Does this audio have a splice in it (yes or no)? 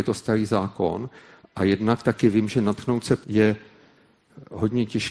yes